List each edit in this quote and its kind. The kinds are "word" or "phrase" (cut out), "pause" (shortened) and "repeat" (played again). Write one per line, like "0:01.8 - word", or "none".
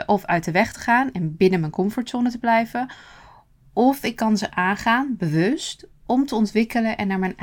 none